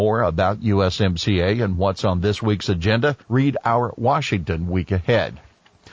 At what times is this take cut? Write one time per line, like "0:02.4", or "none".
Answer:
0:03.2